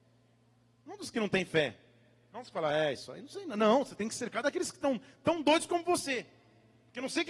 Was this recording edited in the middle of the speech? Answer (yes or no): no